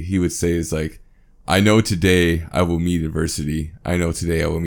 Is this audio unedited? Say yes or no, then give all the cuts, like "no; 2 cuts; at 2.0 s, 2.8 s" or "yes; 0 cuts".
yes; 0 cuts